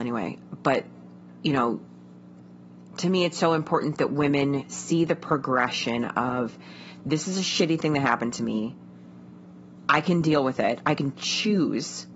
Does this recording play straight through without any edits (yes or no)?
yes